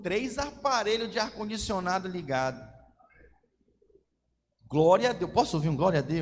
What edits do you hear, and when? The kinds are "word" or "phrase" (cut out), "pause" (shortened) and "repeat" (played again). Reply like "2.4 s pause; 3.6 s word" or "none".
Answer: none

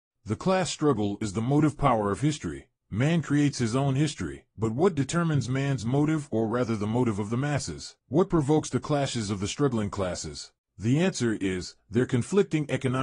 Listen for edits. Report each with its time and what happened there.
2.8 s pause; 4.5 s pause; 8.0 s pause; 10.6 s pause

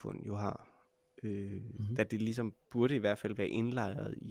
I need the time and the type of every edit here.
2.6 s pause

